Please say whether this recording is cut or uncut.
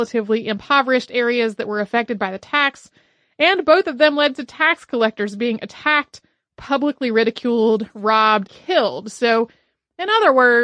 cut